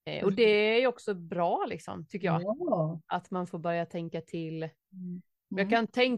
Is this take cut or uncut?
uncut